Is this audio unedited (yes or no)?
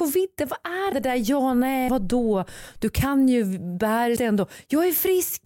no